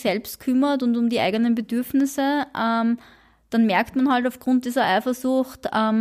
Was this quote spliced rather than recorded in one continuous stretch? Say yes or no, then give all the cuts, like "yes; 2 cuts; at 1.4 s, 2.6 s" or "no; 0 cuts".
no; 0 cuts